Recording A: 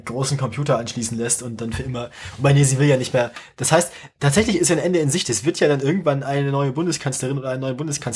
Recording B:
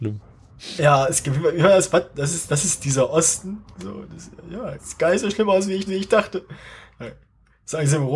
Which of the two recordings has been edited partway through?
B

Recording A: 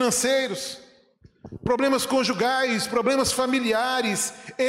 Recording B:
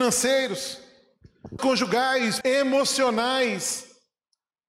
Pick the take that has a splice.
B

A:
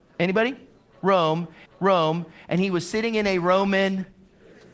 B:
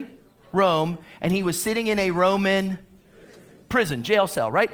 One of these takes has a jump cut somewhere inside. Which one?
A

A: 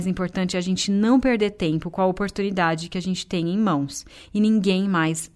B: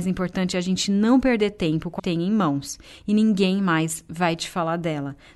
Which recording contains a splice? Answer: B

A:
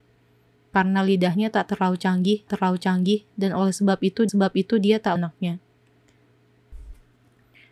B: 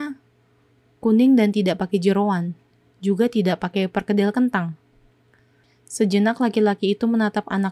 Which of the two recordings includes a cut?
A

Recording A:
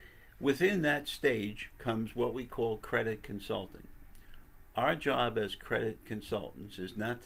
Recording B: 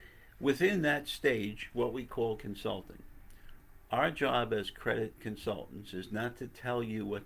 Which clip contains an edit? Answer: B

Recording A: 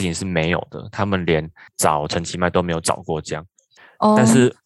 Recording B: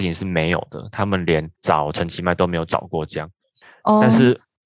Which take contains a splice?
B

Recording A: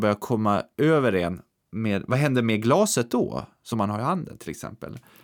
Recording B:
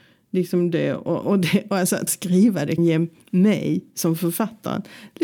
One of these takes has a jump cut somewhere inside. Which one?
B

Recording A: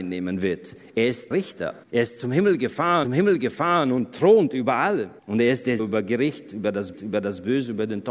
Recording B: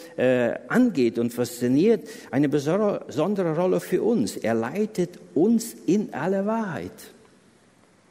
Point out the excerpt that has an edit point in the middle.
A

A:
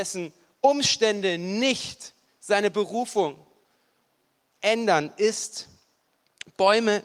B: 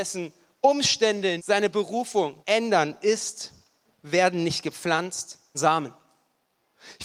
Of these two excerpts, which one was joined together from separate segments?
B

